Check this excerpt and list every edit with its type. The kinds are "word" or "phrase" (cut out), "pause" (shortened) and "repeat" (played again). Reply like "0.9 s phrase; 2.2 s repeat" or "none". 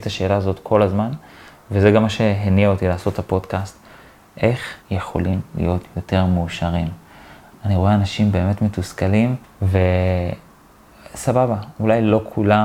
4.8 s word; 9.4 s pause